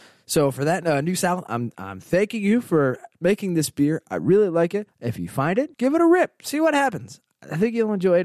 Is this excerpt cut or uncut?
cut